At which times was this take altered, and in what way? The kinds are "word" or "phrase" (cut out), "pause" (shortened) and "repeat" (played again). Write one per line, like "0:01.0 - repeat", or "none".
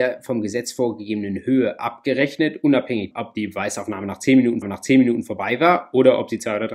0:03.1 - word
0:04.6 - repeat